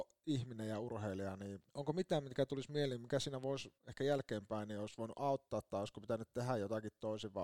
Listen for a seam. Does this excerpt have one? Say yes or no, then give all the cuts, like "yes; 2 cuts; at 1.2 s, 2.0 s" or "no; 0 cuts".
yes; 2 cuts; at 1.7 s, 3.8 s